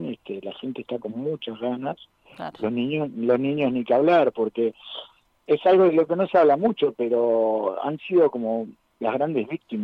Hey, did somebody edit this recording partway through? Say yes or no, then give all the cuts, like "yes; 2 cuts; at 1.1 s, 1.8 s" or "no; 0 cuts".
no; 0 cuts